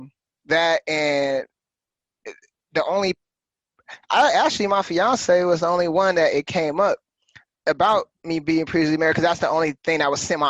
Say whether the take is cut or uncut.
uncut